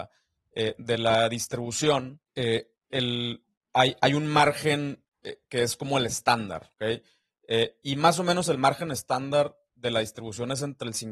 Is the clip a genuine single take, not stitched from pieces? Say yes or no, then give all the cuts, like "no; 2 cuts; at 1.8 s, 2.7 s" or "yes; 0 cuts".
no; 2 cuts; at 2.3 s, 6.7 s